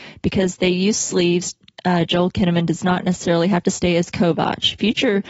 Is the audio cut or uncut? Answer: uncut